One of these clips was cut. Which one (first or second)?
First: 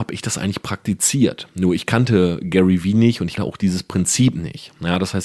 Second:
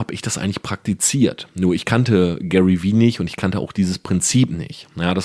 first